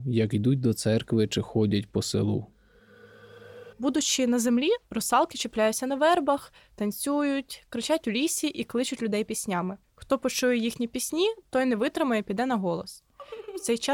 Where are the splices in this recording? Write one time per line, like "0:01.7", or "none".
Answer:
0:03.7
0:09.8